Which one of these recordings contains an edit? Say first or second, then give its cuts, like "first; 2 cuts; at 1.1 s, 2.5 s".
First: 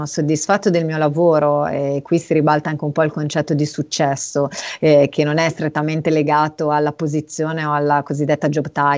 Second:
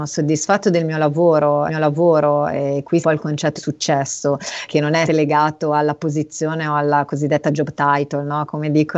second; 5 cuts; at 1.7 s, 3.0 s, 3.6 s, 4.7 s, 5.1 s